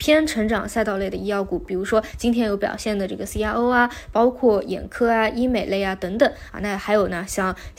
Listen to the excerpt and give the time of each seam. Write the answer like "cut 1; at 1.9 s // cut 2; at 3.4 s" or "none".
none